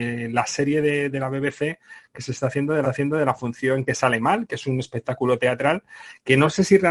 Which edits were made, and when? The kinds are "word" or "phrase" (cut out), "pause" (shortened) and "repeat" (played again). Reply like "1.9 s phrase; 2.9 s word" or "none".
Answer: 2.8 s repeat